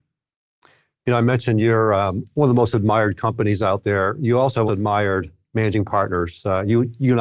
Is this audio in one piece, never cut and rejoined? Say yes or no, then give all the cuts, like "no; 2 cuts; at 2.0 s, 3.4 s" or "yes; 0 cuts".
no; 1 cut; at 4.7 s